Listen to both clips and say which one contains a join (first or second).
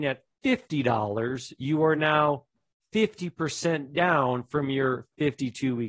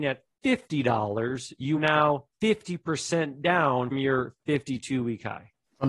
second